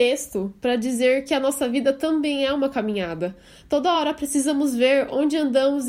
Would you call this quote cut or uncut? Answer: uncut